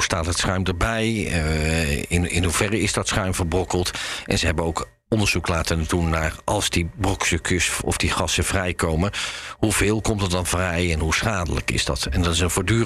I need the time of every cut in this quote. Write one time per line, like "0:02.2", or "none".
none